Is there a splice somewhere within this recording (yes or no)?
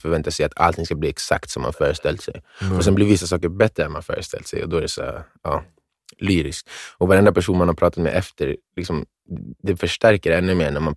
no